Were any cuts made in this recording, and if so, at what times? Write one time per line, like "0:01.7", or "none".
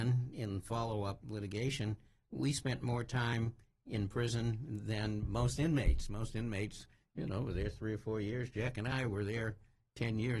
none